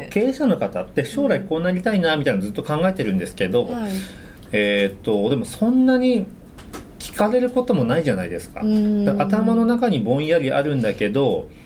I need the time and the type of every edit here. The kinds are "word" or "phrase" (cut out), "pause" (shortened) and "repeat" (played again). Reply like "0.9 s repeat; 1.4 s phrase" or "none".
none

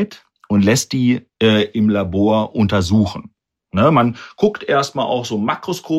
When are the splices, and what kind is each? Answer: none

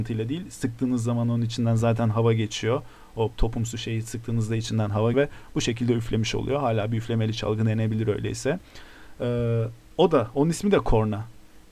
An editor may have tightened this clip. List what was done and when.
3.3 s word; 5.1 s word; 9.8 s pause

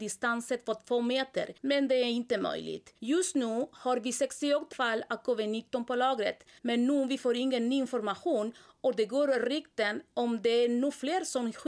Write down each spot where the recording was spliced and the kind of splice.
1.6 s pause; 3.0 s pause; 4.7 s word; 6.6 s pause

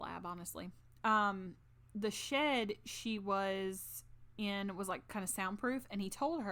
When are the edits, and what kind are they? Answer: none

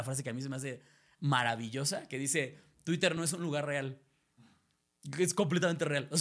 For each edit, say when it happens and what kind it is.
none

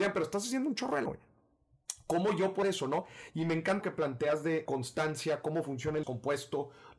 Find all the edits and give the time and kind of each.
1.1 s word; 2.6 s word; 3.8 s word; 4.7 s word; 6.0 s word

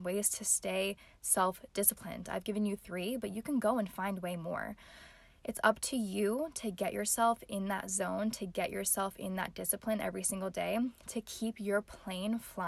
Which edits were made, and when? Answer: none

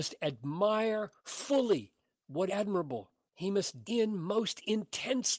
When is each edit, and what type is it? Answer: 1.2 s pause; 2.5 s phrase; 3.8 s word

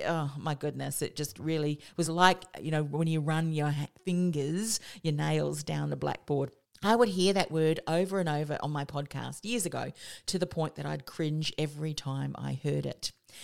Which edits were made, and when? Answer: none

